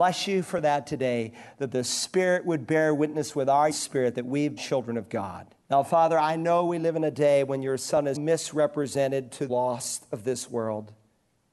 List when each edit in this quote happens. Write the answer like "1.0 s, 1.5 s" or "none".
3.7 s, 4.6 s, 5.6 s, 8.2 s, 9.5 s